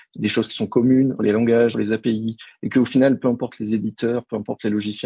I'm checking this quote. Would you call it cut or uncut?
cut